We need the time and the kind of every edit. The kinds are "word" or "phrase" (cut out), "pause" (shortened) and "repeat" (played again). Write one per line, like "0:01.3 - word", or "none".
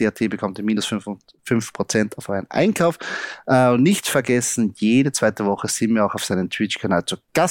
none